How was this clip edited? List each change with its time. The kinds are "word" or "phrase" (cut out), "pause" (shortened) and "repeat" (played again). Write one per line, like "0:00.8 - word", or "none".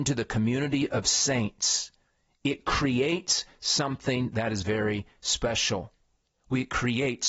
none